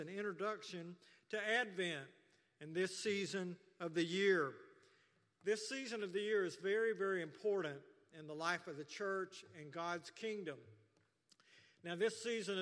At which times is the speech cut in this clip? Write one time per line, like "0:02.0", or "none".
none